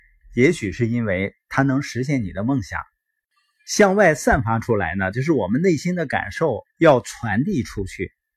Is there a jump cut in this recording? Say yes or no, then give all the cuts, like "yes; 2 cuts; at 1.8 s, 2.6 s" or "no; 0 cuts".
yes; 1 cut; at 6.7 s